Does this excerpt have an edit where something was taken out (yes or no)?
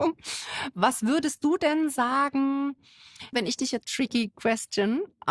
yes